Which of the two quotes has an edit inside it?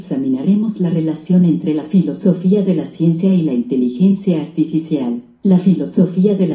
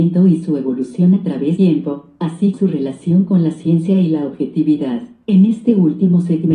second; 2 cuts; at 1.6 s, 2.5 s

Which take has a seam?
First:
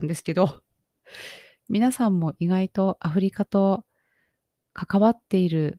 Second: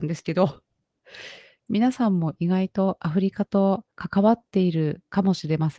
second; 1 cut; at 3.9 s

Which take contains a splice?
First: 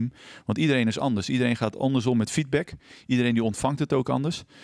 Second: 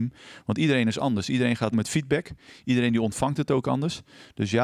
second; 1 cut; at 1.7 s

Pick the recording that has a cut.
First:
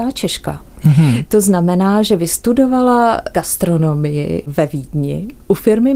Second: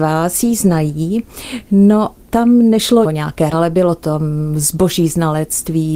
second; 3 cuts; at 2.3 s, 3.0 s, 3.5 s

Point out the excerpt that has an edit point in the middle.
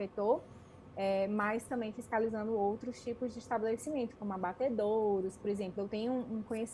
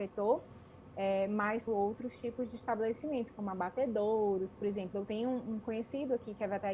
second; 1 cut; at 1.7 s

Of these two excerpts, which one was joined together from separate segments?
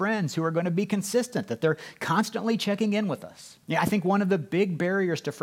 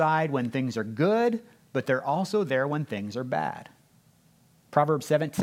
first; 1 cut; at 3.6 s

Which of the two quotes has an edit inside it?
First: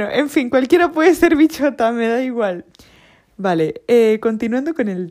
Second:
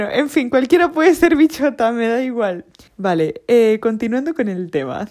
second; 1 cut; at 2.9 s

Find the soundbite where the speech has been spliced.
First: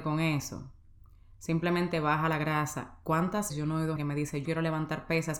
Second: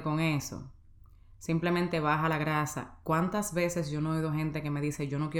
first; 3 cuts; at 3.5 s, 4.0 s, 4.4 s

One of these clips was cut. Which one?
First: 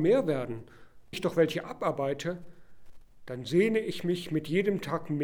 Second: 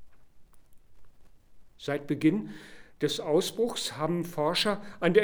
first; 1 cut; at 1.1 s

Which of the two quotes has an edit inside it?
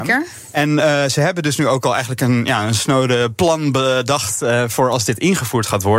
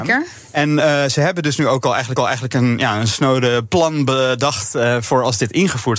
second; 1 cut; at 2.2 s

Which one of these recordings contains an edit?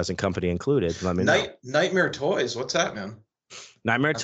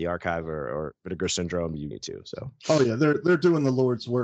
second; 1 cut; at 1.9 s

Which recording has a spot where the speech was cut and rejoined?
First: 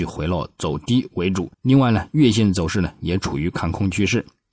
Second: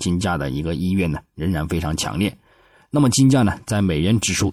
first; 1 cut; at 1.5 s

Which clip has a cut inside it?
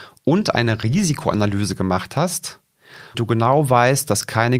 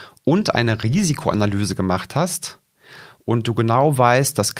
first; 1 cut; at 3.1 s

